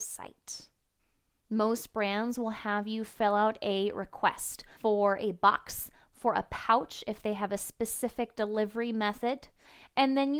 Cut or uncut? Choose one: cut